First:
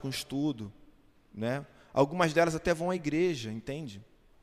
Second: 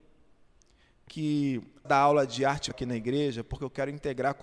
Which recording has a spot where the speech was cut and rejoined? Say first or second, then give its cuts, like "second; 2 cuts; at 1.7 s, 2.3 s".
second; 2 cuts; at 1.8 s, 2.7 s